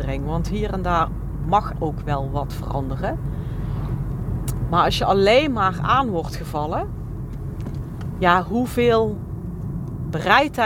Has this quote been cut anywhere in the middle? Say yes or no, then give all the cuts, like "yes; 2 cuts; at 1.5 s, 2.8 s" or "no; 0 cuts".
yes; 1 cut; at 1.7 s